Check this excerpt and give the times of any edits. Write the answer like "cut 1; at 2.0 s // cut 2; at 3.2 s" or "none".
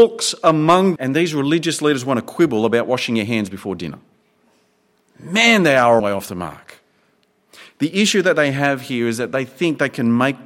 cut 1; at 1.0 s // cut 2; at 6.0 s